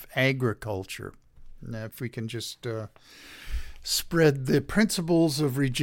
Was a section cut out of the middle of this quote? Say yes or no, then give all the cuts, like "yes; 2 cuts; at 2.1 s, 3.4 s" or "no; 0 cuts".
no; 0 cuts